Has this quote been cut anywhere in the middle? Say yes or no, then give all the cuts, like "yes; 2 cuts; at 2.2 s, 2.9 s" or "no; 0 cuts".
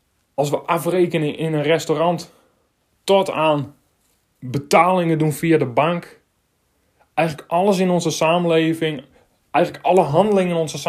no; 0 cuts